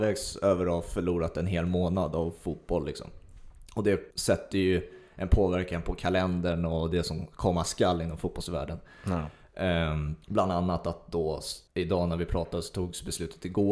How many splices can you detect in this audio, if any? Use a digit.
3